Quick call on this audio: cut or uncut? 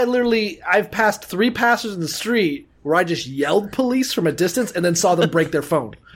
uncut